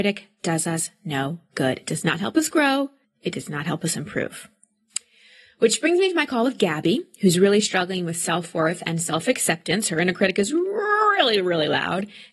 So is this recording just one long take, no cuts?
no; 1 cut; at 3.0 s

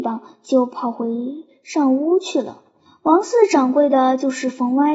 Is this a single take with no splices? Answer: yes; 0 cuts

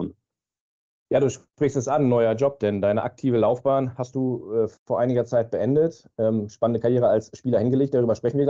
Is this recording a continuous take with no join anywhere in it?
no; 1 cut; at 4.8 s

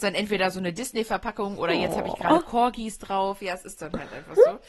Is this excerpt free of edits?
yes; 0 cuts

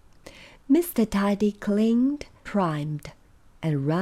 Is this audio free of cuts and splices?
no; 1 cut; at 2.5 s

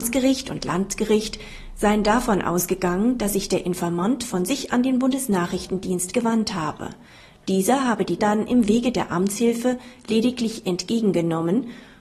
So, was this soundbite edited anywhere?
yes; 2 cuts; at 4.7 s, 8.2 s

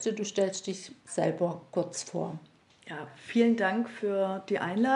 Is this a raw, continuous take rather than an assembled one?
yes; 0 cuts

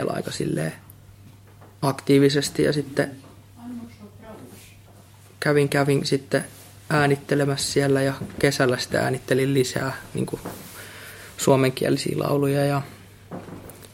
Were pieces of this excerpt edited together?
no; 0 cuts

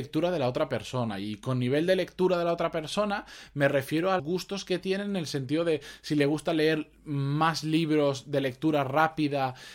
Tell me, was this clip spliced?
yes; 1 cut; at 4.2 s

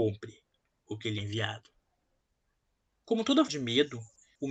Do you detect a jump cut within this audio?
yes; 2 cuts; at 1.2 s, 3.5 s

